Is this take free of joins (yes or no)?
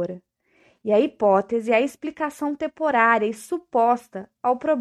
yes